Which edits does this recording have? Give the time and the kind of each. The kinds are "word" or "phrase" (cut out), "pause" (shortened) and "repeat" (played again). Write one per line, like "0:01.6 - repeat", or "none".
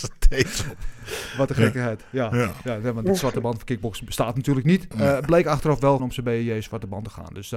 0:06.0 - word

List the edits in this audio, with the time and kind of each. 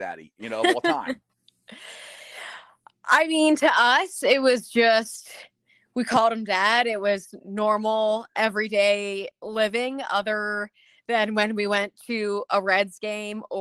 none

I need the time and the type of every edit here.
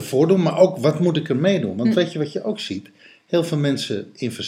none

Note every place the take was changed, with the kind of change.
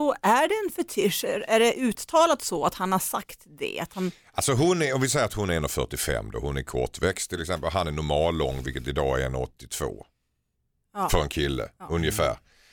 none

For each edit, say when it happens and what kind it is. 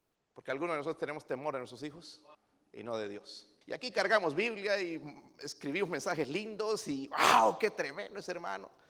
0:02.3 - pause
0:03.6 - pause

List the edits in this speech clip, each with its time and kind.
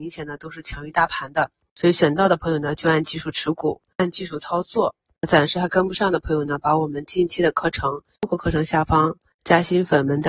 none

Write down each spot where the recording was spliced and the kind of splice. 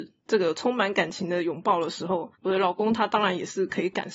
0:02.3 - pause

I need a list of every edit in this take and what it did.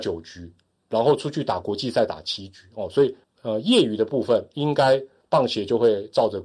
0:03.2 - pause

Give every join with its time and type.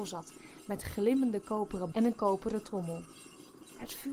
0:01.9 - word

